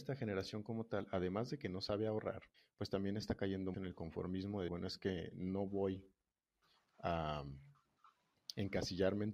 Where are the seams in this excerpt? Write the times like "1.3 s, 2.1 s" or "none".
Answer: 2.5 s, 3.7 s, 4.7 s

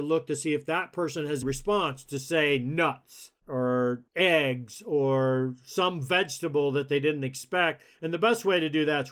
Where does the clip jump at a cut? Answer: 1.4 s, 4.1 s

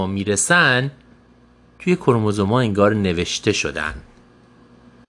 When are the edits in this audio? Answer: none

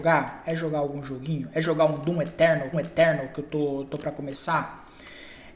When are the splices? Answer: 2.7 s

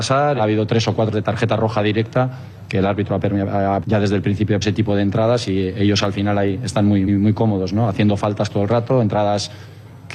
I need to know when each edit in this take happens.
1.1 s, 3.8 s, 4.6 s, 7.1 s

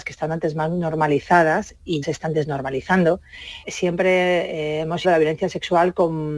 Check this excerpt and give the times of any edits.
2.0 s, 3.6 s, 5.0 s

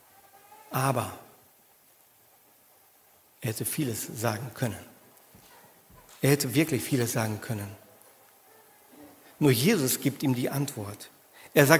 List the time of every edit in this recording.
none

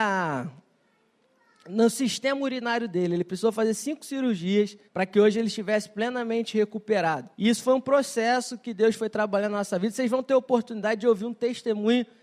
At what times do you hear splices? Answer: 4.9 s, 7.3 s

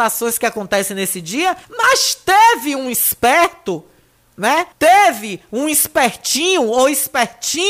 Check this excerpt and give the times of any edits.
1.6 s, 4.7 s

